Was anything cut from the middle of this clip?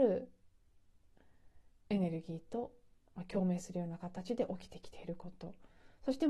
yes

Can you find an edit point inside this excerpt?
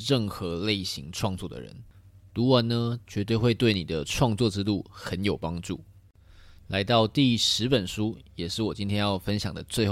no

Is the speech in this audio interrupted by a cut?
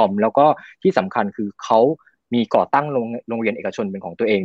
no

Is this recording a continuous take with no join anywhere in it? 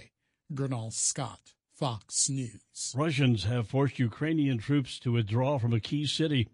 yes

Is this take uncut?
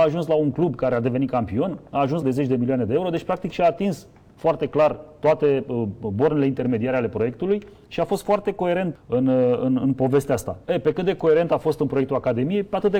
no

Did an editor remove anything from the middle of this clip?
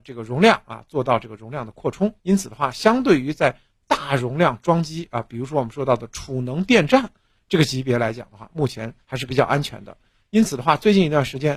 yes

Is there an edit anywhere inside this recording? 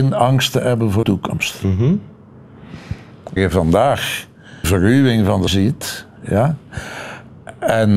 yes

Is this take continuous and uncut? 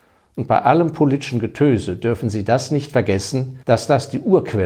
no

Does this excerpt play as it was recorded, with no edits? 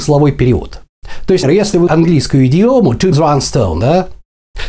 no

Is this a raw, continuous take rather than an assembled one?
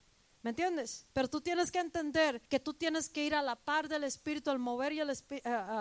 no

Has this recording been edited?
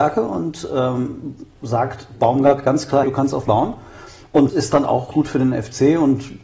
yes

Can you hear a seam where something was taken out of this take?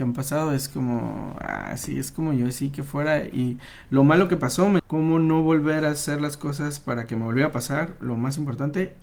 yes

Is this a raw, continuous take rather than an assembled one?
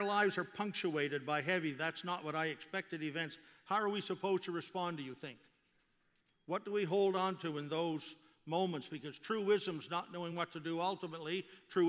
yes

